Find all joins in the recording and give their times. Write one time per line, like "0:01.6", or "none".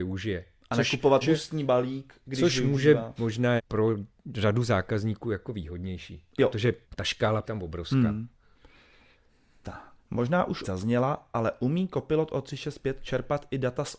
0:01.2
0:03.2
0:03.6
0:06.8
0:07.4
0:10.0
0:10.6